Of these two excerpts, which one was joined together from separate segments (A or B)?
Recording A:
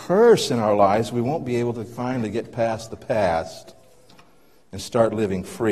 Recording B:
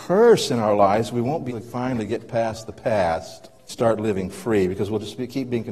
B